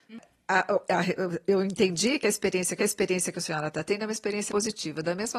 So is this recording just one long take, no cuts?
no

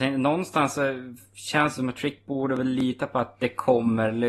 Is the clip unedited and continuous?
yes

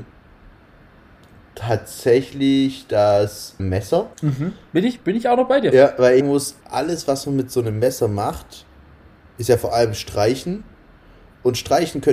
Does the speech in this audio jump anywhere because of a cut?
yes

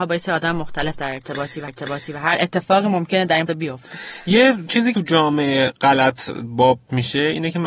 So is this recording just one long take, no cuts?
no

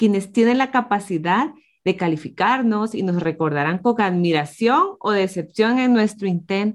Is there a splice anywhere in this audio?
no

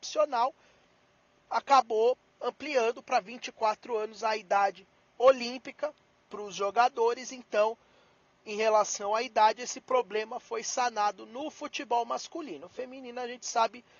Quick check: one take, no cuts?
no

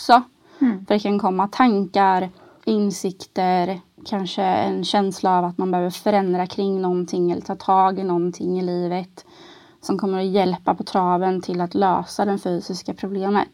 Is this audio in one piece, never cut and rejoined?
yes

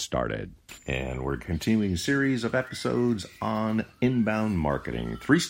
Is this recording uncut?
yes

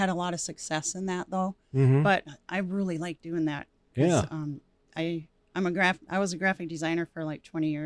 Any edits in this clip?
no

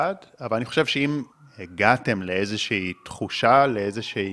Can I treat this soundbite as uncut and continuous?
no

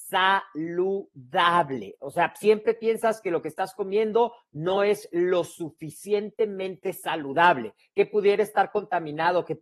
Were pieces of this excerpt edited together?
no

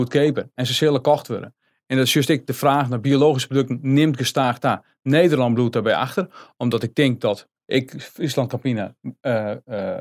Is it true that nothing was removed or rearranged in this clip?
yes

